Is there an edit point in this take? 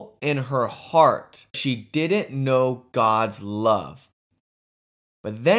yes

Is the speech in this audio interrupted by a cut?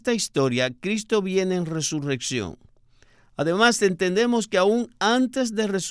no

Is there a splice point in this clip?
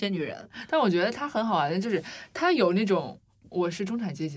no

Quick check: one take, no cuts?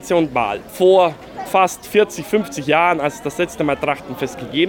no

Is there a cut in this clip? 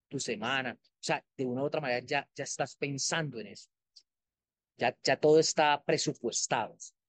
no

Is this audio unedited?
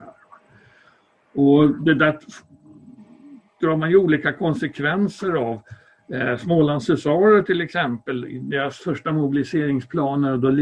yes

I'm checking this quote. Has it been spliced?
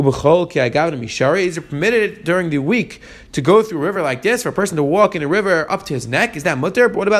no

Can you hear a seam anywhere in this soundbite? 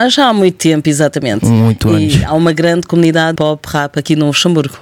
yes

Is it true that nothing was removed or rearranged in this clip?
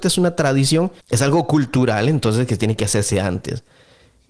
no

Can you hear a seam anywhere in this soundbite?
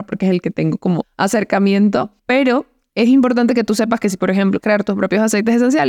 yes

